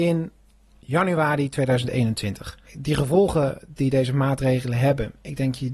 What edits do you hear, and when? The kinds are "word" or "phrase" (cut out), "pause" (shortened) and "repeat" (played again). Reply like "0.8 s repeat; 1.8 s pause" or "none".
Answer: 2.7 s pause